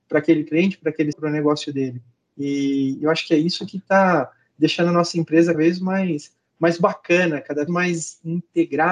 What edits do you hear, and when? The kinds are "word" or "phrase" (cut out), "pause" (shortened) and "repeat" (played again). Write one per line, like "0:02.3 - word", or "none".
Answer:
0:01.1 - word
0:05.5 - word
0:07.7 - word